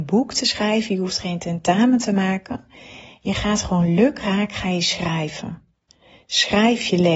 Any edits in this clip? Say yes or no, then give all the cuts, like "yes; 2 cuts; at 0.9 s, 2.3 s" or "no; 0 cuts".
no; 0 cuts